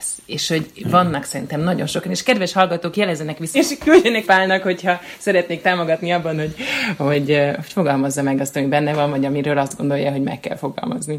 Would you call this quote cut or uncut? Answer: cut